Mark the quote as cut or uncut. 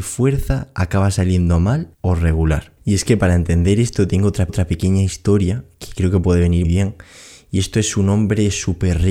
cut